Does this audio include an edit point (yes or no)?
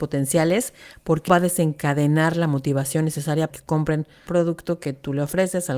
yes